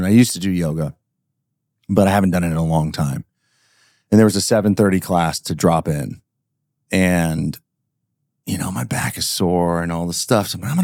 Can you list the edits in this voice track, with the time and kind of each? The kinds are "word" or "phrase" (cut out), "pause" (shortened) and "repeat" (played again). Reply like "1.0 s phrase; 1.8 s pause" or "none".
none